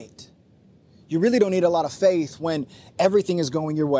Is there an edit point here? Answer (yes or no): no